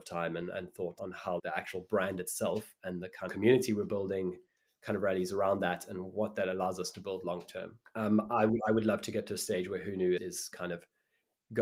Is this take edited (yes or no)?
yes